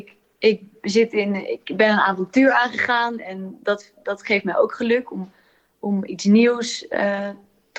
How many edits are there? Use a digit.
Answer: 0